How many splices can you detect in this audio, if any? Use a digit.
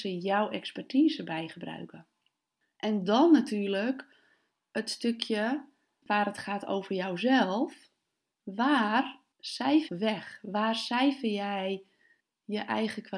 1